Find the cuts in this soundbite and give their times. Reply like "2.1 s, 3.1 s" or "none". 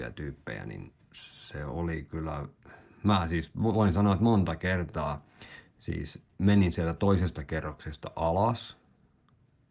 none